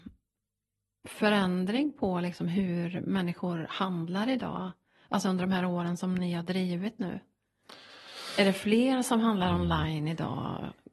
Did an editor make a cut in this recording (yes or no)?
no